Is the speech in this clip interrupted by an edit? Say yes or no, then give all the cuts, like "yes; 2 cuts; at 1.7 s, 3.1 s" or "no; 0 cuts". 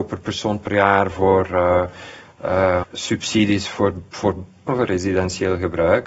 yes; 2 cuts; at 2.8 s, 4.7 s